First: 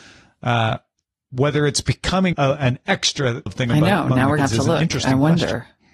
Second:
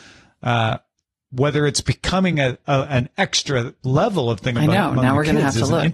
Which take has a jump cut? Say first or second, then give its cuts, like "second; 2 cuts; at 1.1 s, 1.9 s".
first; 3 cuts; at 2.3 s, 3.5 s, 4.4 s